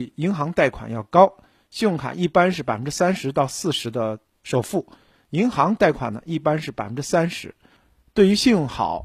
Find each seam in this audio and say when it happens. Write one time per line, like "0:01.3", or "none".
none